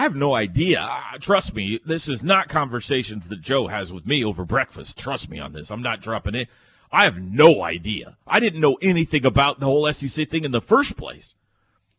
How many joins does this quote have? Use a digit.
0